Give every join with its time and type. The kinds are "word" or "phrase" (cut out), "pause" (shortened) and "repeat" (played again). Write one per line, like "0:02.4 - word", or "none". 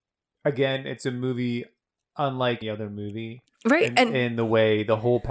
0:02.6 - word